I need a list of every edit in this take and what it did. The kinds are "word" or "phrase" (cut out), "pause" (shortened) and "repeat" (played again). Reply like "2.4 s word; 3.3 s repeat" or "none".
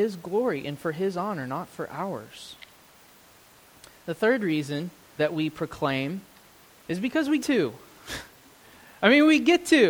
5.2 s word; 6.7 s pause; 7.4 s word